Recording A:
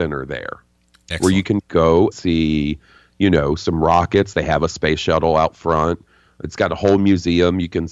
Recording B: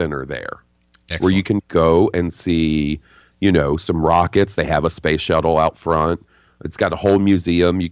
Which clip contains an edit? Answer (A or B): A